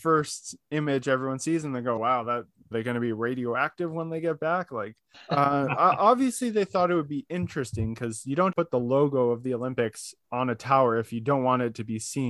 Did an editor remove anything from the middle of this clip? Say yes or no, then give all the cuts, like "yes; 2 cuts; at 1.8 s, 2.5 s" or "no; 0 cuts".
yes; 4 cuts; at 2.0 s, 2.7 s, 5.1 s, 8.5 s